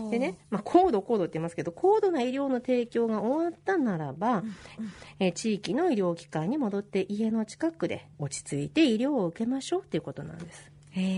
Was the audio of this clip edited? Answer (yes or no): yes